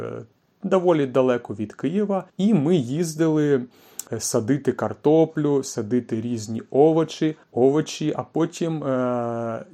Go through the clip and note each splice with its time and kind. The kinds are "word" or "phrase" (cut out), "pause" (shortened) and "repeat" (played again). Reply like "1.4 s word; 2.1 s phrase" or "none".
2.3 s pause; 4.1 s pause; 7.4 s pause